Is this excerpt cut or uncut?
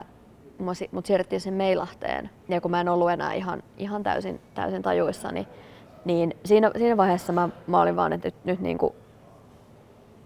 cut